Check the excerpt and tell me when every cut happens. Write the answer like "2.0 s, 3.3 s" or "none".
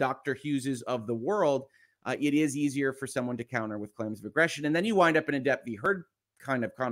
none